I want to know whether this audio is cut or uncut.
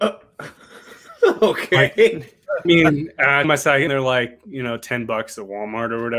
cut